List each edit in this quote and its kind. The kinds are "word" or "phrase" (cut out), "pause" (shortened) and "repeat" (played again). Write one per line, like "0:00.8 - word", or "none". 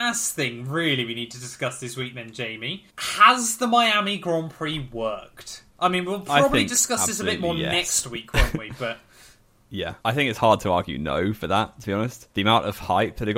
0:02.9 - pause
0:05.7 - pause
0:10.0 - pause
0:12.3 - pause